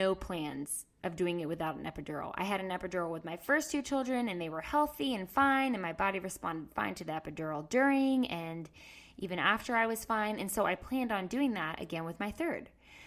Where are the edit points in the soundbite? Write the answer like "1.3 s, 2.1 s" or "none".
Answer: none